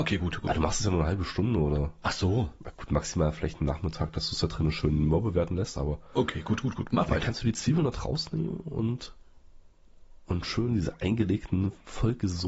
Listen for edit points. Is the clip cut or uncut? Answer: uncut